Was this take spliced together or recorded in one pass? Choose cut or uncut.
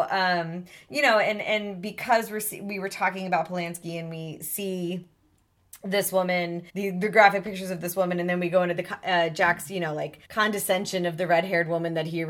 cut